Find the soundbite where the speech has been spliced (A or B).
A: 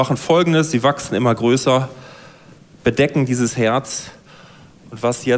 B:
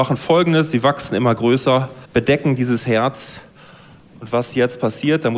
B